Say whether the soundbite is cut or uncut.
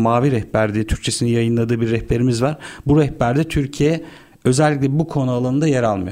uncut